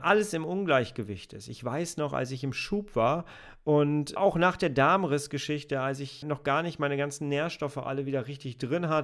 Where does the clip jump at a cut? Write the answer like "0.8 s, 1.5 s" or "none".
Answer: 4.2 s, 6.2 s